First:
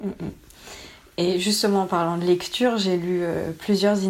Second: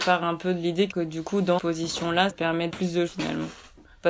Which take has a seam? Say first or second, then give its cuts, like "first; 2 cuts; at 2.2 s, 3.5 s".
second; 5 cuts; at 0.9 s, 1.6 s, 2.3 s, 2.7 s, 3.1 s